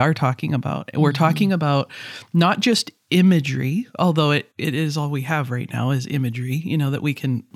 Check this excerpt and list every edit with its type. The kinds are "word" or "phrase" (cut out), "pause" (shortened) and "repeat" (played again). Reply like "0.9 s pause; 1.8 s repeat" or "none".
4.5 s pause